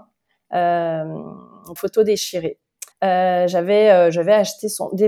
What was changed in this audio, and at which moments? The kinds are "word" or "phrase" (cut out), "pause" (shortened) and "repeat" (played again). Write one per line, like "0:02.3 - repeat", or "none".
0:01.8 - word
0:02.9 - pause